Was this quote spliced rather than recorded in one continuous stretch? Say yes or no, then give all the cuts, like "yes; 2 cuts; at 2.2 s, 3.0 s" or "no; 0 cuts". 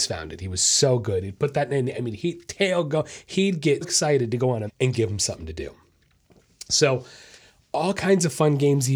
yes; 2 cuts; at 3.8 s, 4.7 s